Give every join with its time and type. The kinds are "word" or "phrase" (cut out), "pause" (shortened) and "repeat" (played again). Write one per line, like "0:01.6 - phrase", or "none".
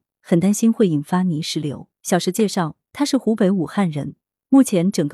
0:01.9 - pause

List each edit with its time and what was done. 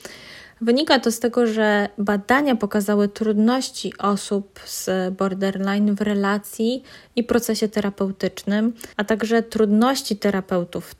0:08.9 - pause

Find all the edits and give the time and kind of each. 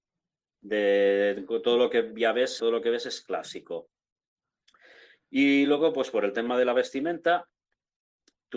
0:02.6 - word

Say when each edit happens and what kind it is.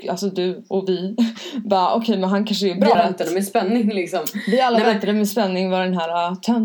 0:02.9 - word

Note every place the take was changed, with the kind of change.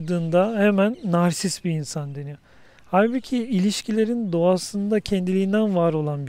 none

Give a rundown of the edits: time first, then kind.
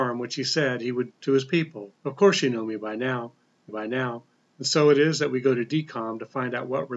0:01.1 - word
0:02.0 - pause
0:03.7 - repeat

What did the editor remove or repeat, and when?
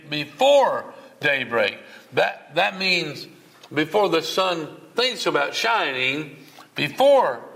0:04.9 - word

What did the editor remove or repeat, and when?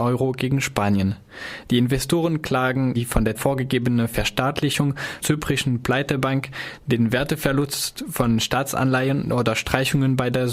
0:02.9 - phrase
0:03.3 - word
0:05.2 - phrase

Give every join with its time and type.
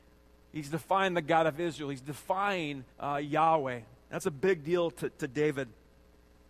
0:02.9 - pause

